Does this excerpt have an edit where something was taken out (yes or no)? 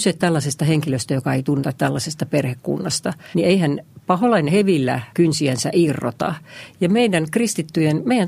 yes